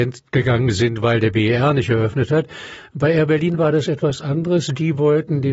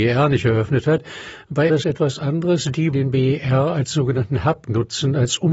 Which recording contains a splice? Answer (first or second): second